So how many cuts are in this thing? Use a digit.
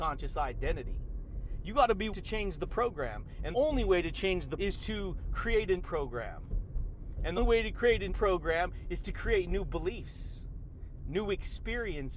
6